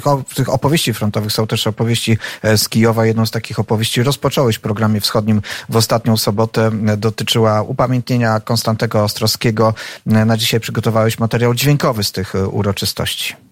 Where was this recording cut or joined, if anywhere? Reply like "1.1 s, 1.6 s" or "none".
none